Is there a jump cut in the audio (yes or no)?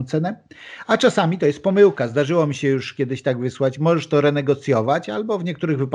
no